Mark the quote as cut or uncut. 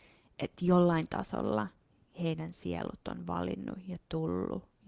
uncut